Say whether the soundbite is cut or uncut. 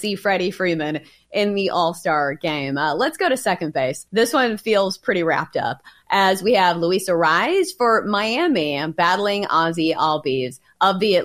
cut